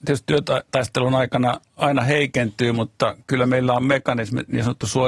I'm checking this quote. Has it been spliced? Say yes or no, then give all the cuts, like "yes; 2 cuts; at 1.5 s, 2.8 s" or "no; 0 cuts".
no; 0 cuts